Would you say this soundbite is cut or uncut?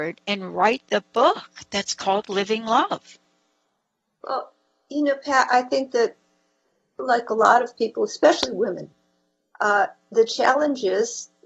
uncut